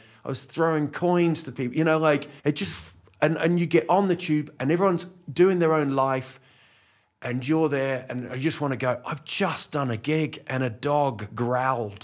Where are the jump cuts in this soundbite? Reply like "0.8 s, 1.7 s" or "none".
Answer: 2.4 s